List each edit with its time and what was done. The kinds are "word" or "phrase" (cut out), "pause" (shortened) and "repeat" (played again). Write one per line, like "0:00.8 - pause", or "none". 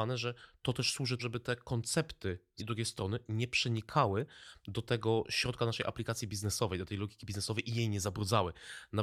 0:01.2 - word
0:02.6 - word